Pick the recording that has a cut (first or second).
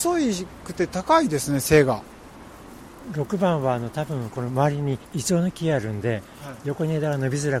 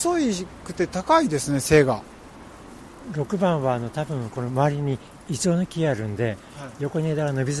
first